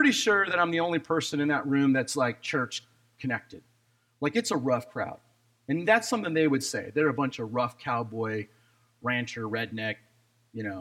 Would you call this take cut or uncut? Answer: uncut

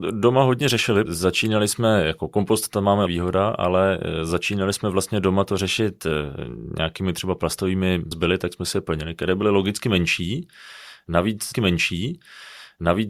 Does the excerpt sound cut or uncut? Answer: cut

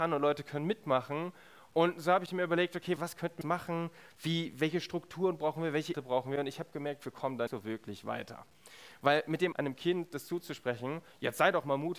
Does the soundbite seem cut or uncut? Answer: cut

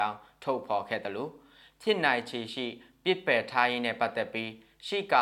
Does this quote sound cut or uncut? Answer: uncut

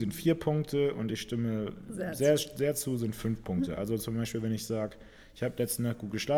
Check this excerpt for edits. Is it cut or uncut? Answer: uncut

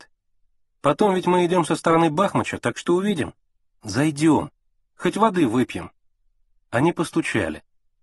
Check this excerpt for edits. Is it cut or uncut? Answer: uncut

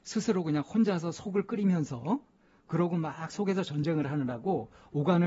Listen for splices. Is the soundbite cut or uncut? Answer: uncut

